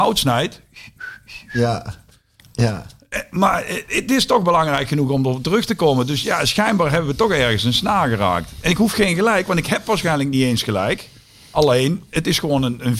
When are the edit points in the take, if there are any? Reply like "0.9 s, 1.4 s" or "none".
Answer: none